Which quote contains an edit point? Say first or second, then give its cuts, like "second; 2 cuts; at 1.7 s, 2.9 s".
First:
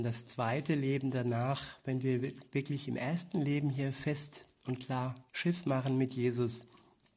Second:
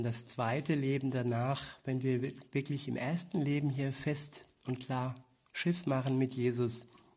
first; 1 cut; at 5.3 s